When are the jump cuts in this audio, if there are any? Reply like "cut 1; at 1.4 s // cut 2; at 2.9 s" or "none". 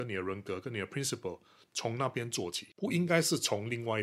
none